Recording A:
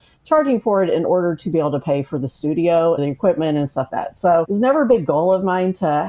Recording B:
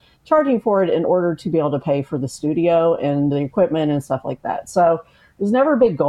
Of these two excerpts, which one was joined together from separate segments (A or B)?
A